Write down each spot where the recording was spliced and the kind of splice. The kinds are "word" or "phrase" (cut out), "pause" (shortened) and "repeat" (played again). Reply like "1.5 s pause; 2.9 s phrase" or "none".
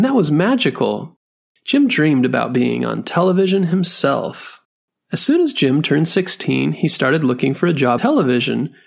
8.0 s word